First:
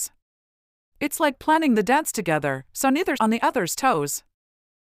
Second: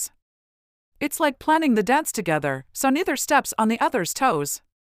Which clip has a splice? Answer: first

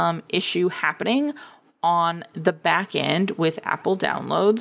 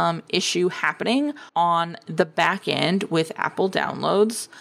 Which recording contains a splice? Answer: second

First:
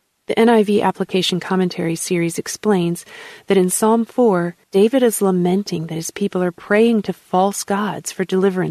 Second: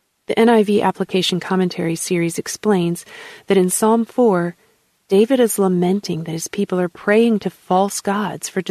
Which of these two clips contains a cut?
first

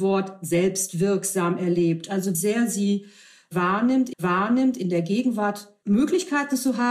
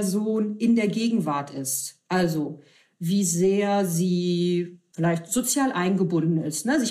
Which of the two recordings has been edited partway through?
first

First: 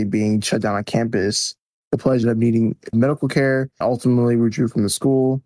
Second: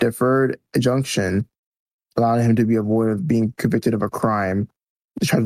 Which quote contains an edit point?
first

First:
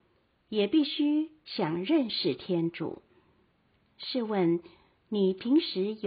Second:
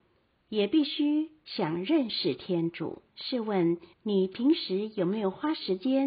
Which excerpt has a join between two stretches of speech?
second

